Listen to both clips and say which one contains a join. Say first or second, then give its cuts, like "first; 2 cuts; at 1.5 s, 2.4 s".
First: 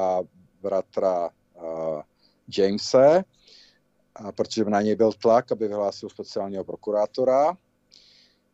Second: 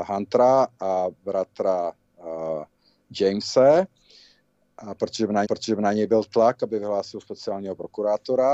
second; 2 cuts; at 1.2 s, 5.4 s